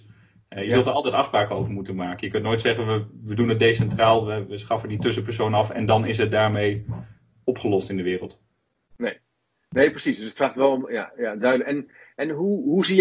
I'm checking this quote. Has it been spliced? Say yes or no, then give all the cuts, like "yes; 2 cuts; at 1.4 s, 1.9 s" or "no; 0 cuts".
no; 0 cuts